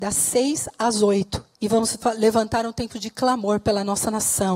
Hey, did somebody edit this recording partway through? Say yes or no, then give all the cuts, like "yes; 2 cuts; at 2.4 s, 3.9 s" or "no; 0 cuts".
yes; 1 cut; at 1.5 s